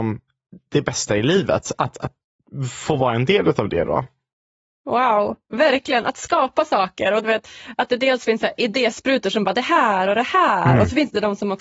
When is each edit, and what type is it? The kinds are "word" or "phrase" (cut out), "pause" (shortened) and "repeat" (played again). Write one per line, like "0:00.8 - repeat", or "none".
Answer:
none